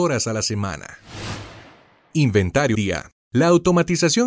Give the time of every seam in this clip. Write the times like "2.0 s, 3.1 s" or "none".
2.7 s